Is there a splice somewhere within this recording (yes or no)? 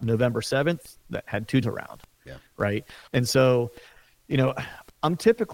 yes